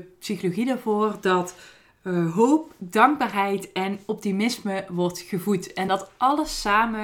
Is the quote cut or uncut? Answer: uncut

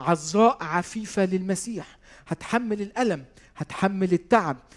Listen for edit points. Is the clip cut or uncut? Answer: uncut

